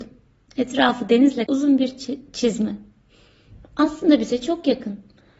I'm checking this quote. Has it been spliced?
yes; 1 cut; at 1.5 s

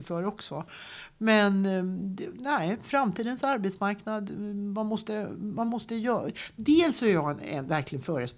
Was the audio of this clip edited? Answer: no; 0 cuts

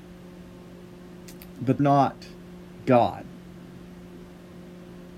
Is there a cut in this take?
yes; 2 cuts; at 1.8 s, 2.4 s

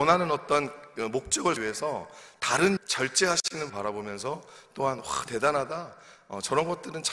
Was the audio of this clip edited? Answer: yes; 4 cuts; at 1.6 s, 2.8 s, 3.7 s, 5.3 s

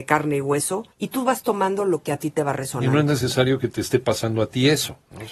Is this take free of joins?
no; 1 cut; at 0.9 s

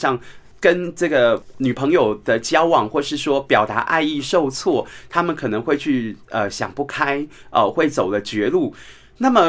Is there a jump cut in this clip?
yes; 1 cut; at 6.2 s

